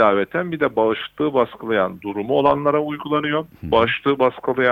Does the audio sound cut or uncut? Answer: uncut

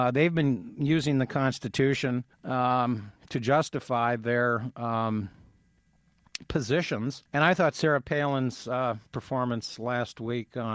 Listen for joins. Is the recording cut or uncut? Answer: cut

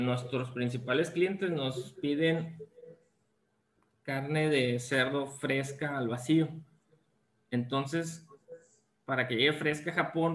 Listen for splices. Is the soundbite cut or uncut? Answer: uncut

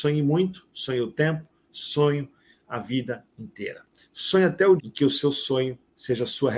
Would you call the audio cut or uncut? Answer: cut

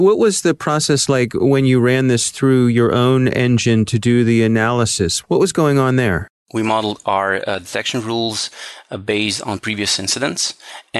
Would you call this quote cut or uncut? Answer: uncut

